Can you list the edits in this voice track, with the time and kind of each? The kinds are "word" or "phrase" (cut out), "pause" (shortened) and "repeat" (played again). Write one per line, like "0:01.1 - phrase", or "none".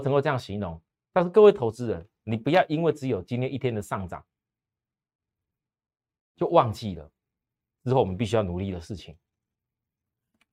none